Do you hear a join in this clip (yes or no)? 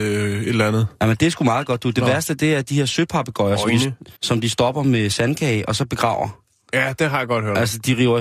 yes